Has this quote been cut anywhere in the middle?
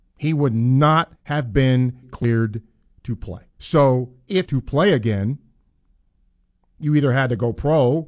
yes; 4 cuts; at 1.2 s, 2.0 s, 3.5 s, 4.5 s

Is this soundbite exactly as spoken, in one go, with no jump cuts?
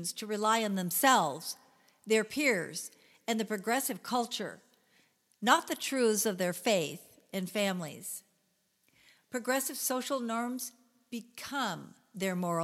yes; 0 cuts

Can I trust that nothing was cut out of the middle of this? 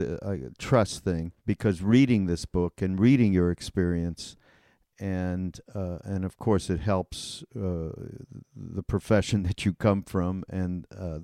no; 1 cut; at 1.4 s

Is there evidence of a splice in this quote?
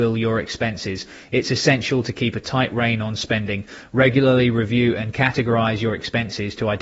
no; 0 cuts

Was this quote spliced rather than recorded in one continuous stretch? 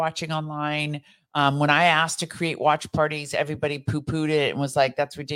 no; 0 cuts

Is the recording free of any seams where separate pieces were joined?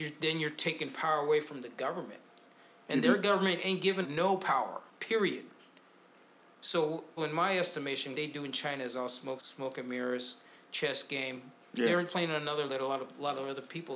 no; 6 cuts; at 4.0 s, 7.2 s, 8.1 s, 9.4 s, 12.1 s, 12.7 s

